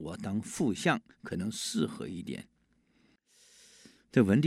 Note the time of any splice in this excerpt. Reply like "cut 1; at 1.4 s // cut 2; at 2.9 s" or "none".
none